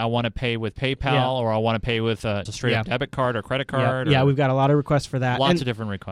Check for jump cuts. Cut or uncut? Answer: cut